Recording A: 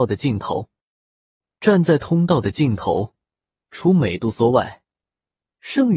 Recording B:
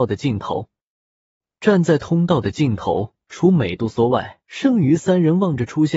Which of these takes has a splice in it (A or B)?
B